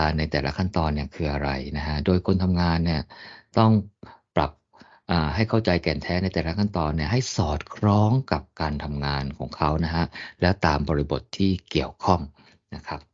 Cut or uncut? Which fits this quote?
uncut